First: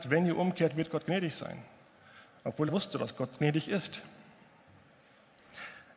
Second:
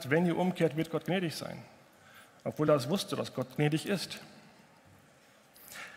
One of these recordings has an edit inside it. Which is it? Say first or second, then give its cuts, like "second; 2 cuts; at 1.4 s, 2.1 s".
first; 1 cut; at 2.7 s